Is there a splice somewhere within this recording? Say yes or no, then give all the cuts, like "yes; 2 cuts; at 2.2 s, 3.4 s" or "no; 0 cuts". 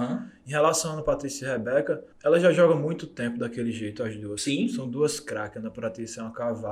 yes; 1 cut; at 2.1 s